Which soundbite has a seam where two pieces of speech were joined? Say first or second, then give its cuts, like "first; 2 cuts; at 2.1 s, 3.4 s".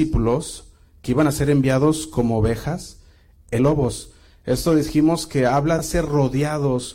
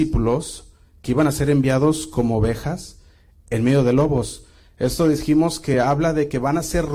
first; 2 cuts; at 3.6 s, 5.8 s